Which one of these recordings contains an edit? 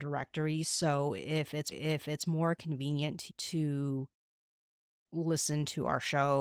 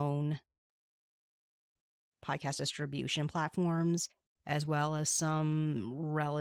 first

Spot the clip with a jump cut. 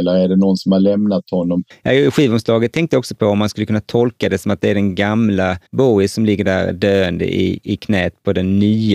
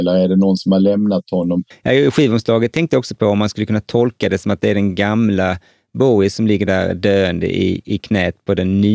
first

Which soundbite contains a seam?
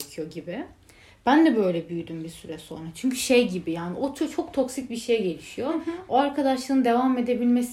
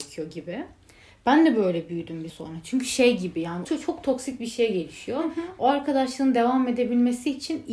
second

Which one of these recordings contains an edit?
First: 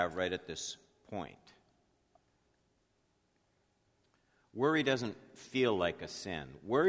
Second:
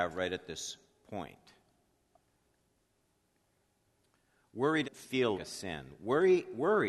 second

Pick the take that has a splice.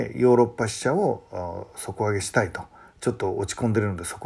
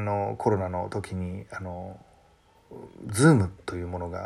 second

